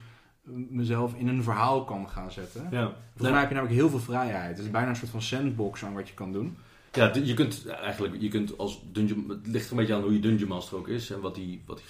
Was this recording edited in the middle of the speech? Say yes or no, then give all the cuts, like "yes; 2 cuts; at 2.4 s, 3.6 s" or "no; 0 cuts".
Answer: no; 0 cuts